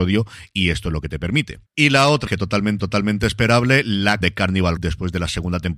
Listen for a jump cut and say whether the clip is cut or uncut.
cut